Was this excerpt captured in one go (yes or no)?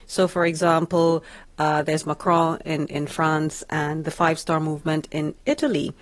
yes